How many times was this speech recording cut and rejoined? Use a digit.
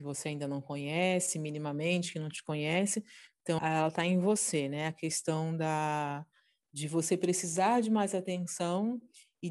1